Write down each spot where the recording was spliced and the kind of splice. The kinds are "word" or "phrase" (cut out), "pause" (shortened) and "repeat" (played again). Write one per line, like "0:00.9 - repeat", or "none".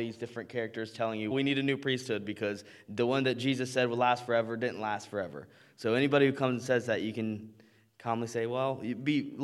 0:01.3 - word